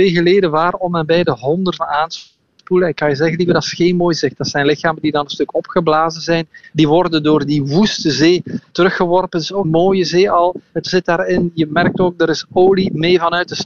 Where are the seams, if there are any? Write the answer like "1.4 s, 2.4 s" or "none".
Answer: 1.8 s, 9.6 s, 10.9 s